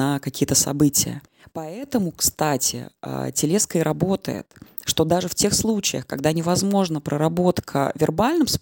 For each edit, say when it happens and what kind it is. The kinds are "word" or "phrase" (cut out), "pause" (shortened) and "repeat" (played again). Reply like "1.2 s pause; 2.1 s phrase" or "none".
1.3 s pause